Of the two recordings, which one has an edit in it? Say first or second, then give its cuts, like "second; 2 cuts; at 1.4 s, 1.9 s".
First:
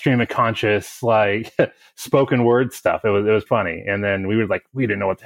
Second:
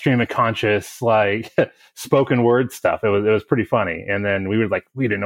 first; 1 cut; at 3.5 s